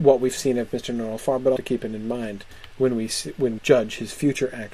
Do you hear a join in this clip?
yes; 3 cuts; at 1.2 s, 1.6 s, 3.6 s

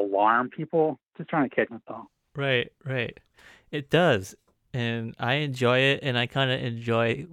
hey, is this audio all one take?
no; 1 cut; at 1.7 s

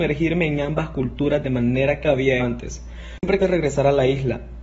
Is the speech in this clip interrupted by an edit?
yes; 3 cuts; at 2.0 s, 2.4 s, 3.4 s

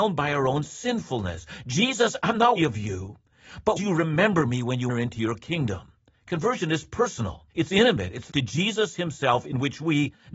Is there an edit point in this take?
yes; 6 cuts; at 2.6 s, 3.8 s, 4.9 s, 6.1 s, 7.5 s, 8.3 s

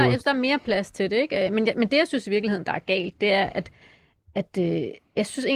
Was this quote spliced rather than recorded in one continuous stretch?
no; 0 cuts

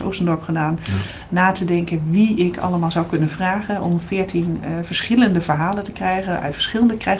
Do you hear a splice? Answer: no; 0 cuts

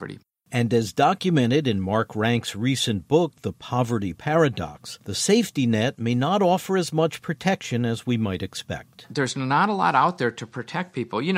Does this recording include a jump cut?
yes; 1 cut; at 5.0 s

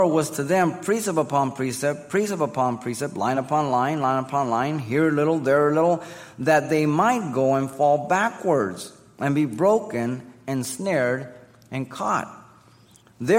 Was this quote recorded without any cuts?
yes; 0 cuts

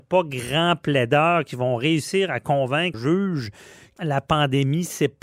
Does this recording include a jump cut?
yes; 2 cuts; at 2.9 s, 4.0 s

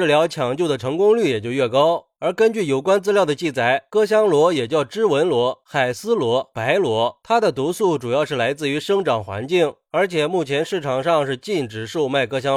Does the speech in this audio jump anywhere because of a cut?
no; 0 cuts

